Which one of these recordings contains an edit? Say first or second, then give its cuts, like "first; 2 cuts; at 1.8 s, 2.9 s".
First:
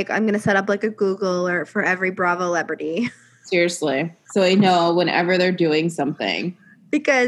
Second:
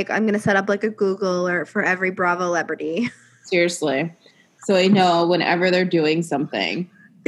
first; 1 cut; at 4.2 s